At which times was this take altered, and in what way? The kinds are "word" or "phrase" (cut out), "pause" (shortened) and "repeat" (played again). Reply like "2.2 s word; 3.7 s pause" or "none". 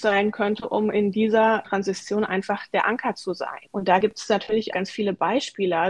1.6 s word; 4.7 s word